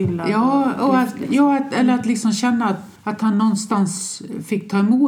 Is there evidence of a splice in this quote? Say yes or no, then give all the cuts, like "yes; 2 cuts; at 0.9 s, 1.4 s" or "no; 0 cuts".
yes; 1 cut; at 3.0 s